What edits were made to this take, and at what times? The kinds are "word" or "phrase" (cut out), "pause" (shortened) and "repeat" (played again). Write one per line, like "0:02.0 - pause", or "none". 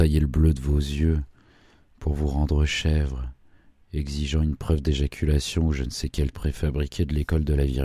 0:06.3 - word